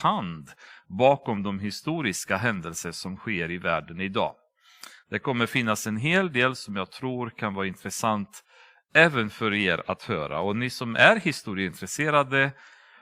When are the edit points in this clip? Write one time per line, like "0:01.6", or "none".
none